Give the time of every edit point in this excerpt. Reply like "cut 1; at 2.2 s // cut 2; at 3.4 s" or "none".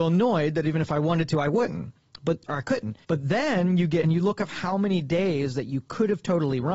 cut 1; at 2.5 s // cut 2; at 3.0 s // cut 3; at 4.0 s